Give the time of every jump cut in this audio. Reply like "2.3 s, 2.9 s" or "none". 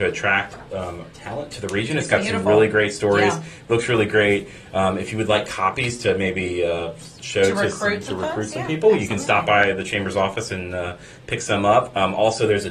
none